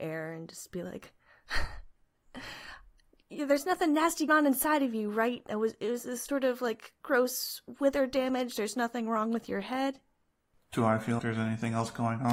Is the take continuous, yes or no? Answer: no